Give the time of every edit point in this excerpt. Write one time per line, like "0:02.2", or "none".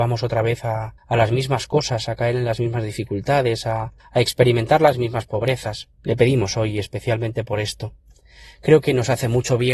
0:01.0
0:04.0
0:05.9